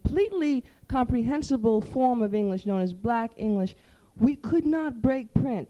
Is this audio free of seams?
yes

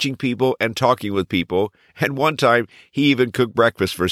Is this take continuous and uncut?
yes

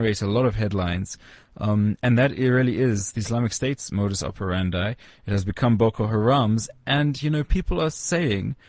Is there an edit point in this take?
no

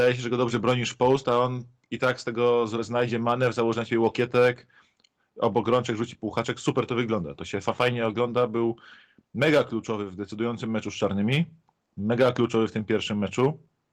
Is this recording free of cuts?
yes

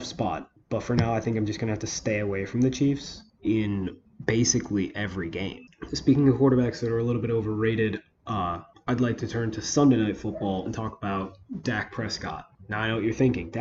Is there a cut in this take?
no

